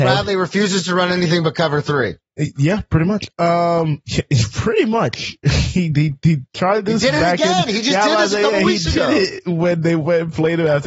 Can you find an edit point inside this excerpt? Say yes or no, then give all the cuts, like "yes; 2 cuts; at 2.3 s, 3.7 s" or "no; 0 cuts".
no; 0 cuts